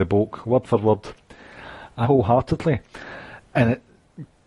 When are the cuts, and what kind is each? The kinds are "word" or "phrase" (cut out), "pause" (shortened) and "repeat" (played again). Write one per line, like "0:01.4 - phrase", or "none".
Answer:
0:02.0 - word